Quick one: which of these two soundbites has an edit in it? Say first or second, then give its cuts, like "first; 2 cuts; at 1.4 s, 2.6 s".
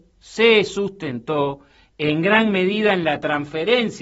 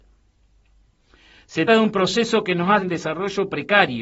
second; 2 cuts; at 1.7 s, 2.8 s